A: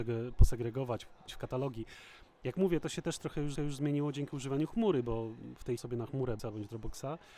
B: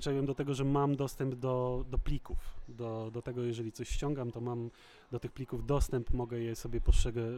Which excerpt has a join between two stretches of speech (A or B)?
A